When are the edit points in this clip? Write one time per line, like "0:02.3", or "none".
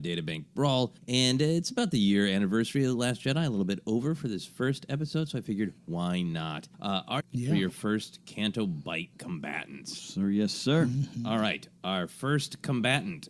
0:01.0
0:05.8
0:06.7
0:07.2
0:09.1